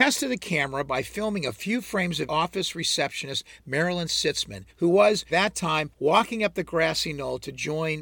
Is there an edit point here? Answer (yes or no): yes